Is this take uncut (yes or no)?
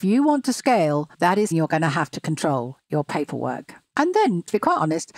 no